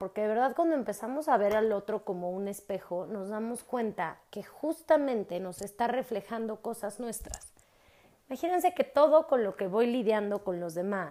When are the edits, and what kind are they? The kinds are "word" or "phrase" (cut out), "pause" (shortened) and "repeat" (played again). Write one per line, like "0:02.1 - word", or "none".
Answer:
none